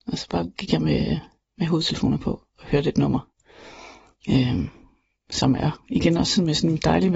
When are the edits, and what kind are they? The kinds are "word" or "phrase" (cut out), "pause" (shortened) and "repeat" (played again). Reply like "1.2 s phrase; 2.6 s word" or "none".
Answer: none